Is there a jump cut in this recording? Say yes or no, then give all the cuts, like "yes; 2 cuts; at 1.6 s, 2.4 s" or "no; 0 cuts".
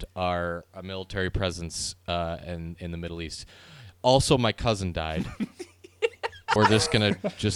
yes; 1 cut; at 6.6 s